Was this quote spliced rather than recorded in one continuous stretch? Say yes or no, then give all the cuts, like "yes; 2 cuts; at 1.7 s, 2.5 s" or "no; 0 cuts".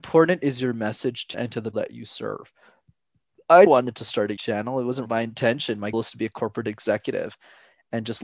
yes; 6 cuts; at 1.3 s, 1.7 s, 3.7 s, 4.4 s, 5.1 s, 5.9 s